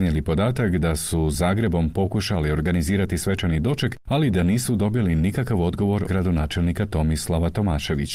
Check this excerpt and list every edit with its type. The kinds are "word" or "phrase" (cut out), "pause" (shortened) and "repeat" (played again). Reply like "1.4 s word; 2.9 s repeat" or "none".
1.3 s word; 6.1 s word